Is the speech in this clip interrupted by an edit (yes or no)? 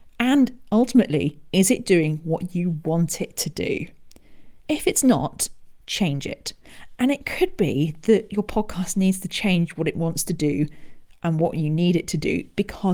yes